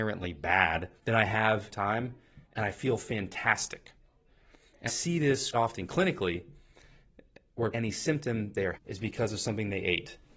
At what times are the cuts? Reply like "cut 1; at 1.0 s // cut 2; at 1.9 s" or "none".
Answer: cut 1; at 1.0 s // cut 2; at 1.7 s // cut 3; at 2.4 s // cut 4; at 4.9 s // cut 5; at 5.5 s // cut 6; at 7.7 s // cut 7; at 8.7 s